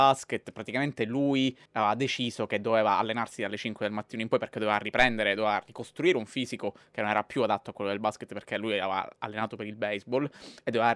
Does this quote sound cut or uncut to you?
cut